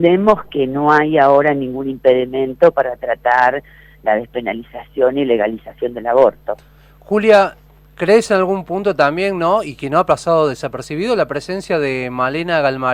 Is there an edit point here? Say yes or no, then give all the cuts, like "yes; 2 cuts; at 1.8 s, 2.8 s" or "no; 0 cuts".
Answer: no; 0 cuts